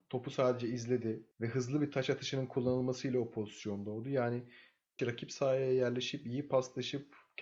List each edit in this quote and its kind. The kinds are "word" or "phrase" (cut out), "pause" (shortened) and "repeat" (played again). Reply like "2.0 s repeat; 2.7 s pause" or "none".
1.3 s pause; 5.0 s word